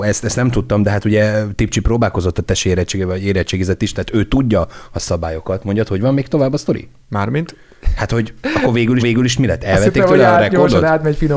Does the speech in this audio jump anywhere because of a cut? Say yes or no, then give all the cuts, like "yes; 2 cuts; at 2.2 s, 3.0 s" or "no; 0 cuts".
yes; 2 cuts; at 7.0 s, 9.0 s